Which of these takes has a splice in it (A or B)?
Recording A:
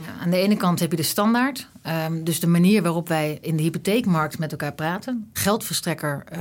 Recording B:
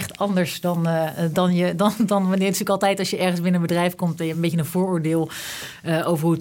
A